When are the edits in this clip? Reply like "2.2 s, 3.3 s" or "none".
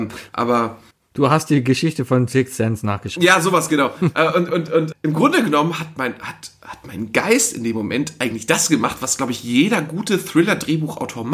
0.9 s, 4.9 s

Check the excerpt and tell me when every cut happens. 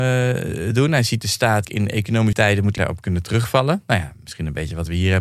1.6 s, 2.3 s, 2.8 s

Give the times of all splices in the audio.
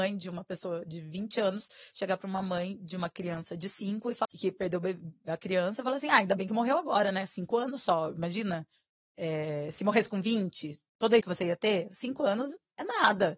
4.2 s, 11.2 s

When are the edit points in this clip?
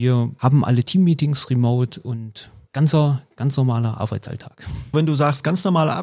none

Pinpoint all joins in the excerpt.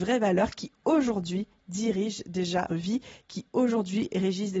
2.7 s

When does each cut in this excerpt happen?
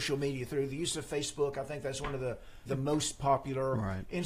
2.7 s

